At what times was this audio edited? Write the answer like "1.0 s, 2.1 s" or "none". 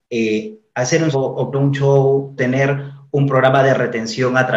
1.1 s, 1.5 s, 2.4 s